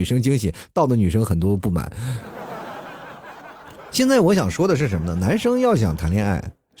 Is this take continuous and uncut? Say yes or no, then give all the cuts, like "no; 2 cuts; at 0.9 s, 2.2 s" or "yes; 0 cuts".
yes; 0 cuts